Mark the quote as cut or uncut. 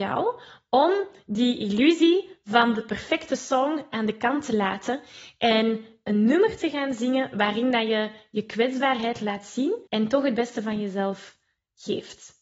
cut